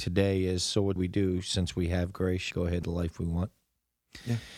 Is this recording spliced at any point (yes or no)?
yes